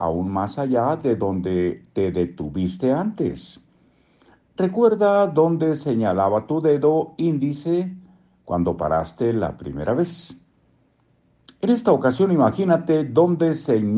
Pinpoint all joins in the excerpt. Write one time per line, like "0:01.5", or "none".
none